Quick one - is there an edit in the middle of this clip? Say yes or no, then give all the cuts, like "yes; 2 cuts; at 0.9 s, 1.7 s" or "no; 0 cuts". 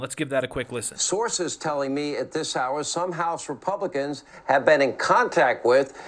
no; 0 cuts